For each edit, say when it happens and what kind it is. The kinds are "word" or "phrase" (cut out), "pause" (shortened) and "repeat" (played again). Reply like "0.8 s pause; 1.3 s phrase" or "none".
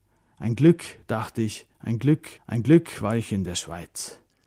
2.4 s pause